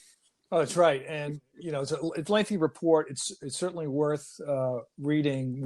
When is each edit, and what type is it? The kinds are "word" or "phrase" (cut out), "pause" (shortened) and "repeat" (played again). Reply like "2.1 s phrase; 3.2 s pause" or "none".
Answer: none